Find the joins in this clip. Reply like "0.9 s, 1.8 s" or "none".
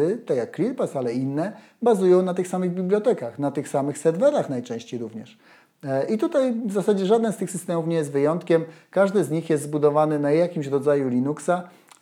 none